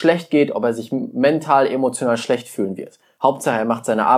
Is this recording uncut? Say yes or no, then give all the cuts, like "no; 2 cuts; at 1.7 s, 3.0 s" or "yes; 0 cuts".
yes; 0 cuts